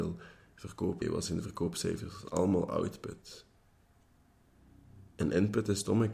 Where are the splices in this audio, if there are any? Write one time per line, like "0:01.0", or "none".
0:01.0
0:05.1